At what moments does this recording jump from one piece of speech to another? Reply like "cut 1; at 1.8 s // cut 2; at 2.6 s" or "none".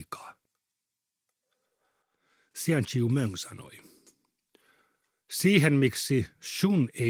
none